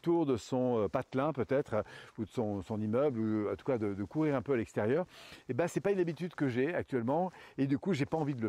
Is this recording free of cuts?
yes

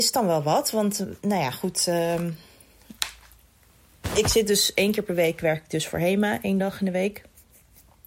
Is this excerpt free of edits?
yes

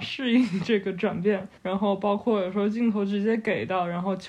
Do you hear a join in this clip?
yes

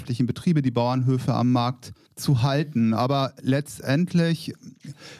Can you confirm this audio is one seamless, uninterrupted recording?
yes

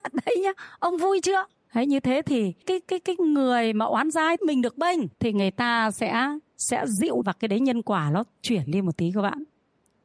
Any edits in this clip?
yes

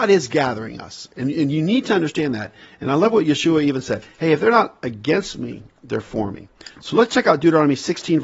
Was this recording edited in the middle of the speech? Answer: no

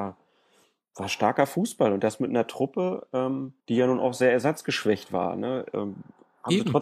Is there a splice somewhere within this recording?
yes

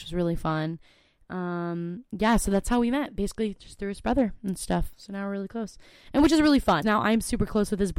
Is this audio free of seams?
no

